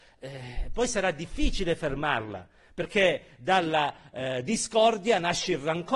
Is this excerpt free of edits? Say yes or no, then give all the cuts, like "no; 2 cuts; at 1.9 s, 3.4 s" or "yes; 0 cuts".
yes; 0 cuts